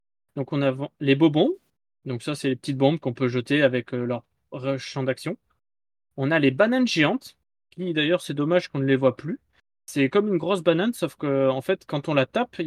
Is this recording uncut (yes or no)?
yes